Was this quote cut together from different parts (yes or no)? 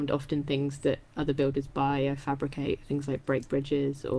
yes